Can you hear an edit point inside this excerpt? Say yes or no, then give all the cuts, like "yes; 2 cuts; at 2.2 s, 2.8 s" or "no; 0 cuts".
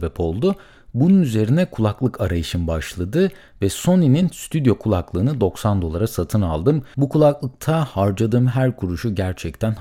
no; 0 cuts